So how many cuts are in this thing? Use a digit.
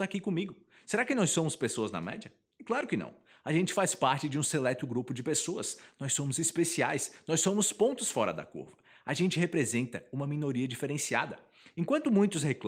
0